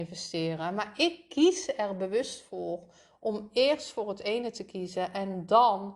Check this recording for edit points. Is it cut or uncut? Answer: uncut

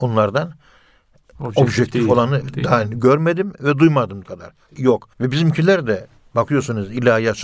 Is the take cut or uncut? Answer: cut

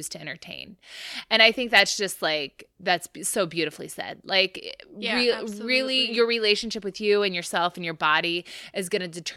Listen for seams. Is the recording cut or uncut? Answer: cut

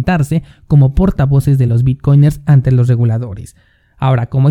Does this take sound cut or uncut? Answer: uncut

